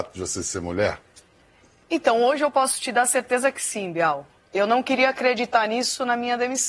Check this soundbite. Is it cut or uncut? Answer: uncut